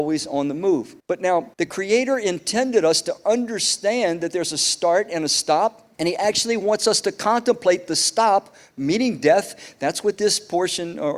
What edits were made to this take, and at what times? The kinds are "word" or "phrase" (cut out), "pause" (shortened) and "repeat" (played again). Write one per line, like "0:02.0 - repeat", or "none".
0:01.0 - pause
0:01.5 - pause
0:05.9 - pause